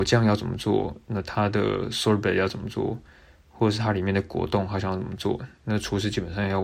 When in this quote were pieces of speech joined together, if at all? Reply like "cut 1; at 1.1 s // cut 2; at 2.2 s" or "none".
none